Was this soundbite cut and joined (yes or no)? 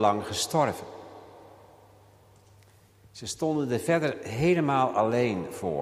no